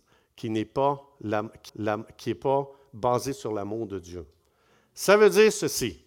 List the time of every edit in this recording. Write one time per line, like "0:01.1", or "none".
0:01.7